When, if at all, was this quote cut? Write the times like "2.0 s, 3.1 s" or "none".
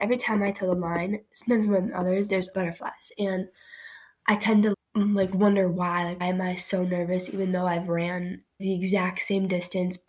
2.5 s, 4.7 s, 6.2 s, 8.6 s